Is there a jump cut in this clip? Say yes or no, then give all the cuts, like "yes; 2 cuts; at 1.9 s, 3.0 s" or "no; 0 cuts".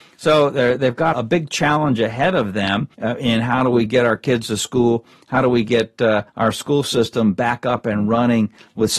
yes; 3 cuts; at 1.1 s, 2.9 s, 6.3 s